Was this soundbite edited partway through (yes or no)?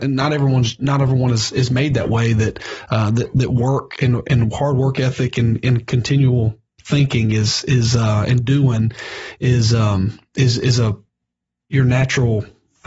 no